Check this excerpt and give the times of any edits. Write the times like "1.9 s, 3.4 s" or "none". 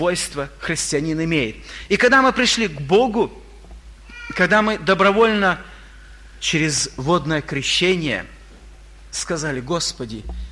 none